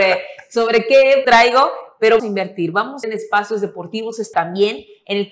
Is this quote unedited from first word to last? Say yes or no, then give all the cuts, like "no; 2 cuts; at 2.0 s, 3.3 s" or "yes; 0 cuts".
no; 4 cuts; at 1.2 s, 2.2 s, 3.0 s, 4.3 s